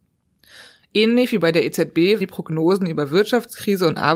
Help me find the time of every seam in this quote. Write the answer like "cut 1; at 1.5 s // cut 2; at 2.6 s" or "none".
cut 1; at 2.2 s